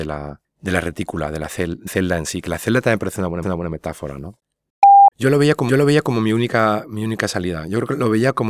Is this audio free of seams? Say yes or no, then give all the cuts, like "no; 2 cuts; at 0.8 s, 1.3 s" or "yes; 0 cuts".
no; 4 cuts; at 1.9 s, 3.4 s, 5.1 s, 5.7 s